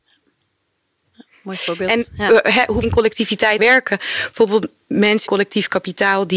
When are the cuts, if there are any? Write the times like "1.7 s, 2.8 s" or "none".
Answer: 2.8 s, 3.6 s, 5.3 s